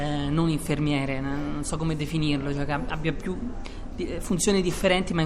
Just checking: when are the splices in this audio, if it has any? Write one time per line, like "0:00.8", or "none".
none